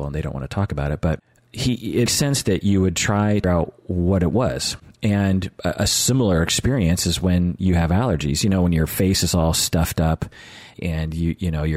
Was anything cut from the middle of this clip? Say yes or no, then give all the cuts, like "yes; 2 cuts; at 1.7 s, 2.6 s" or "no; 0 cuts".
yes; 3 cuts; at 2.1 s, 3.4 s, 10.7 s